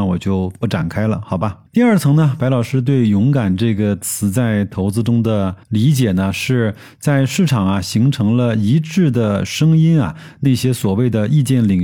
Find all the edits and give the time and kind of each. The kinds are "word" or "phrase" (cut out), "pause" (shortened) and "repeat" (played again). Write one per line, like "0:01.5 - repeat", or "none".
0:05.6 - pause